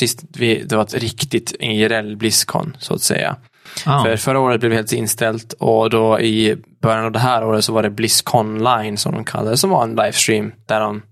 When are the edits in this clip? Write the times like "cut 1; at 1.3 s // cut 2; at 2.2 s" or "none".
none